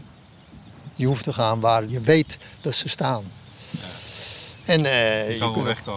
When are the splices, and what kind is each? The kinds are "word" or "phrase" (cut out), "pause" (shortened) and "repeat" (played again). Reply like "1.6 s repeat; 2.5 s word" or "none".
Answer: 1.2 s phrase; 1.9 s phrase